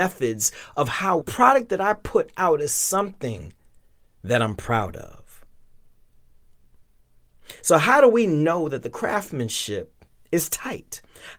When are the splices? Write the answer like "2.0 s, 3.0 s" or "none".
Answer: 1.2 s